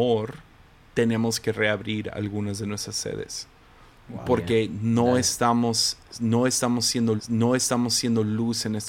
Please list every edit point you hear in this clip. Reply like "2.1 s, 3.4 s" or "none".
7.2 s